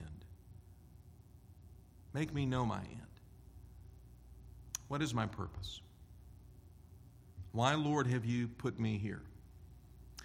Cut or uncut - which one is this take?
uncut